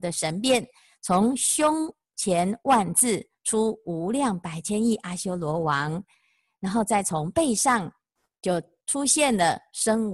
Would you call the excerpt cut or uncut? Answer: uncut